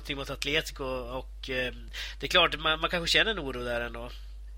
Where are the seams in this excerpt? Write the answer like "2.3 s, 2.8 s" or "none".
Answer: none